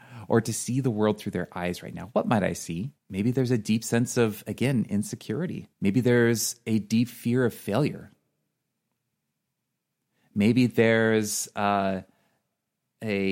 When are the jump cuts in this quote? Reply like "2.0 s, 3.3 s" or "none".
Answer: 3.0 s, 5.7 s

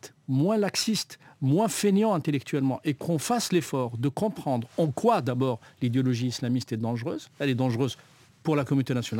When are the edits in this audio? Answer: none

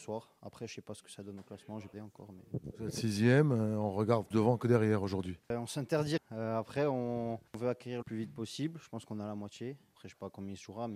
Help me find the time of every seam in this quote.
1.9 s, 4.3 s, 5.4 s, 6.2 s, 8.0 s

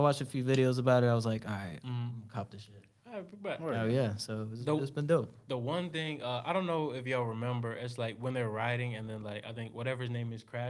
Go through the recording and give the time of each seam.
none

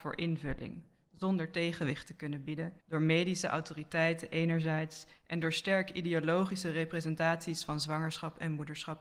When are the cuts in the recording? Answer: 2.8 s

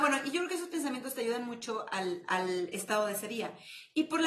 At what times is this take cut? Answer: none

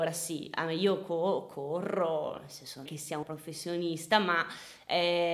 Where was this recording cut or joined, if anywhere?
2.9 s, 3.2 s

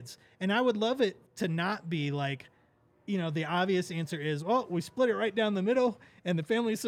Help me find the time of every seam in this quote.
1.3 s

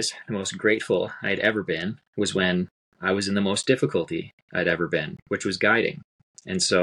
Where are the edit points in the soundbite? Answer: none

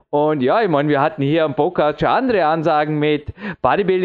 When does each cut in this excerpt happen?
none

